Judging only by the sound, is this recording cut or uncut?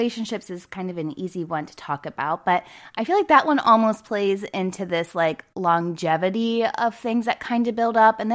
uncut